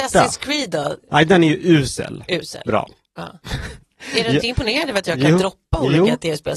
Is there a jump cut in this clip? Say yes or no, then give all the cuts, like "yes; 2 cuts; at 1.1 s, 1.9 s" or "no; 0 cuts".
no; 0 cuts